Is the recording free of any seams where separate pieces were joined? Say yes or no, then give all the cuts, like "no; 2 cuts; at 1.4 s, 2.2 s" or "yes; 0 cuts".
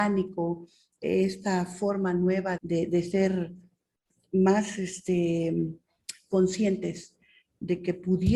no; 1 cut; at 2.6 s